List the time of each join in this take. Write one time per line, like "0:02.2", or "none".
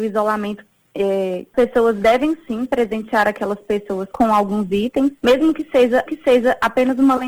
0:01.5
0:04.1
0:05.2
0:06.1